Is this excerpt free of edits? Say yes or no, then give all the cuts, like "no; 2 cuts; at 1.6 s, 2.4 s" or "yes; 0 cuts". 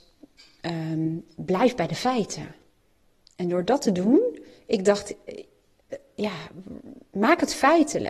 yes; 0 cuts